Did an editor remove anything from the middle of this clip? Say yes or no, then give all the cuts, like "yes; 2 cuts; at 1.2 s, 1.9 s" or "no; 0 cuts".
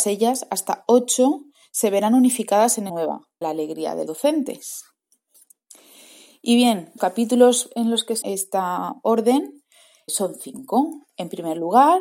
yes; 6 cuts; at 2.9 s, 3.4 s, 4.1 s, 7.0 s, 8.2 s, 10.1 s